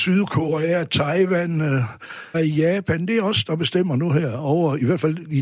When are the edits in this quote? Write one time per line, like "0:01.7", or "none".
0:02.3